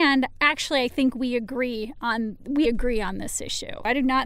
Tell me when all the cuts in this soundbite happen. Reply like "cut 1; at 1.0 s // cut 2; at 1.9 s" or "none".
cut 1; at 2.6 s